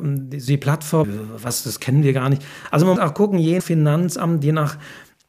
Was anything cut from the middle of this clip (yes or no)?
yes